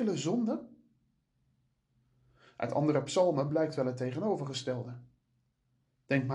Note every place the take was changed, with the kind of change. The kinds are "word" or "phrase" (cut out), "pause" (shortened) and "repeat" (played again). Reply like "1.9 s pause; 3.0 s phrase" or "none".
none